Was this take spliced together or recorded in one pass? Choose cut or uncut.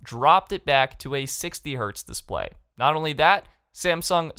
uncut